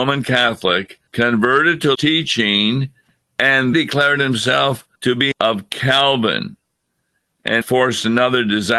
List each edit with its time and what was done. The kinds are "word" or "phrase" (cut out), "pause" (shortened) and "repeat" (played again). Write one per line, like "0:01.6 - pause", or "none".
0:01.1 - pause
0:01.9 - word
0:03.7 - word
0:04.9 - pause
0:05.3 - phrase
0:07.6 - word